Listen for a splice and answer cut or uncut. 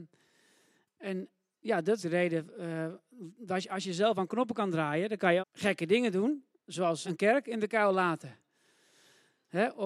cut